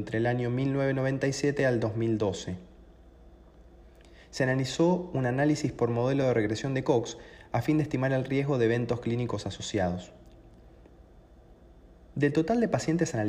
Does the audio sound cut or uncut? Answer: uncut